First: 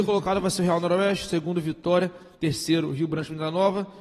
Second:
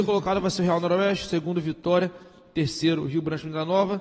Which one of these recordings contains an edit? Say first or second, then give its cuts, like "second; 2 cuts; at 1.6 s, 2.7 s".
first; 1 cut; at 2.3 s